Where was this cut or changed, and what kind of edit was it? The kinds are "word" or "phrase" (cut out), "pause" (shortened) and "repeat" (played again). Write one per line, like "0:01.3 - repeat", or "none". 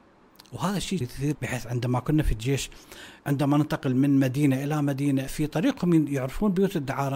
0:01.0 - word
0:01.3 - word
0:03.2 - pause
0:05.3 - word

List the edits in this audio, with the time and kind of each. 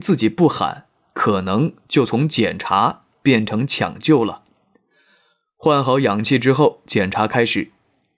none

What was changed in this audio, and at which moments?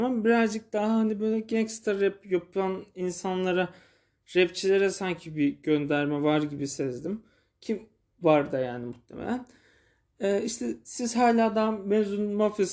none

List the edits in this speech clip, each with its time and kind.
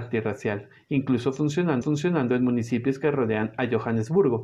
0:01.8 - repeat

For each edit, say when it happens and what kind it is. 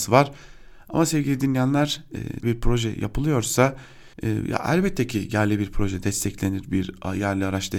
0:02.4 - word
0:04.1 - pause

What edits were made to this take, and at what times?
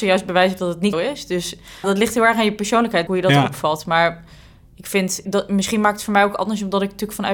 0:00.9 - word
0:01.8 - word
0:03.1 - word
0:05.2 - word

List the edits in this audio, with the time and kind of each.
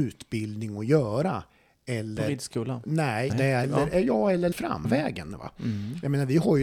0:03.3 - word
0:03.6 - word
0:04.5 - word
0:04.8 - word

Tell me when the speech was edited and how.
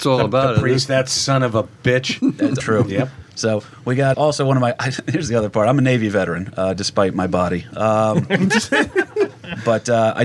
0:02.6 - word
0:04.1 - word

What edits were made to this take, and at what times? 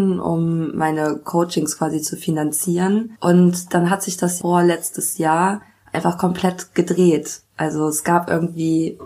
0:07.5 - pause

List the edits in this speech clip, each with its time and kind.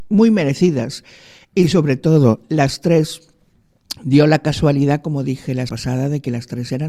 0:05.7 - word

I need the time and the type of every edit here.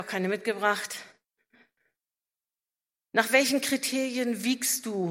none

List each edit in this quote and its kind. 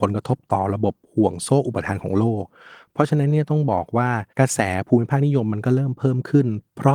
0:04.3 - pause

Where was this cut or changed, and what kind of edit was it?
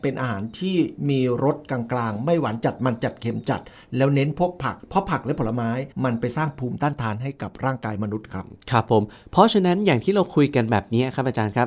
0:04.8 - pause
0:05.9 - pause

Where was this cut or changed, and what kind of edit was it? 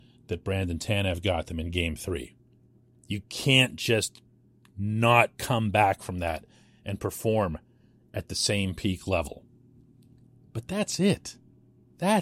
0:05.3 - pause

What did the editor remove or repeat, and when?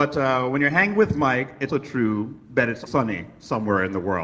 0:01.7 - word
0:02.9 - word

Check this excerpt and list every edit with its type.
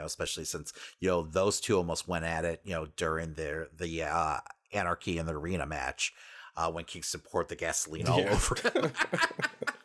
none

